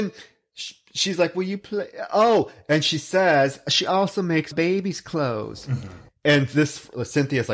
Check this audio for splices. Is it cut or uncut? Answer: cut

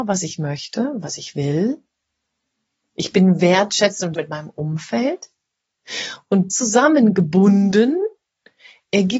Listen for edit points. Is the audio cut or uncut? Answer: cut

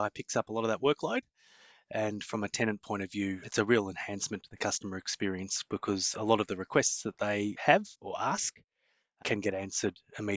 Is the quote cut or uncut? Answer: uncut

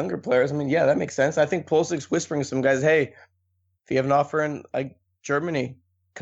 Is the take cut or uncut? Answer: uncut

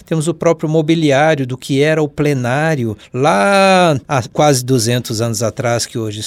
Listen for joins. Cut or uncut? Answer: uncut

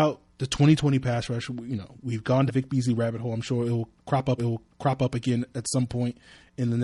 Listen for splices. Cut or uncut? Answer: cut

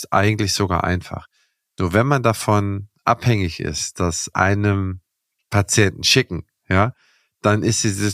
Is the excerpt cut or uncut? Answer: cut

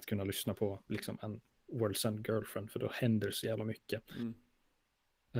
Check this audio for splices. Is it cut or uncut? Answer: uncut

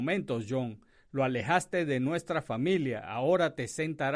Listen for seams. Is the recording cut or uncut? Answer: uncut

